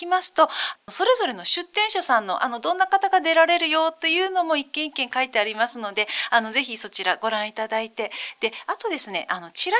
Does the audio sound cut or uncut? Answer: uncut